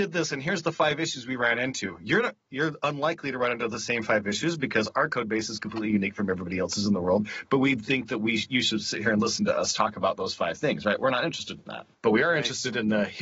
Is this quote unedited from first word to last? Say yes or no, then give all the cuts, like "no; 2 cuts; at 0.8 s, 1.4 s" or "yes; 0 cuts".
no; 1 cut; at 11.9 s